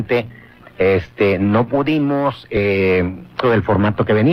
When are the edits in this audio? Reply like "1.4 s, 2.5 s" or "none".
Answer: 3.4 s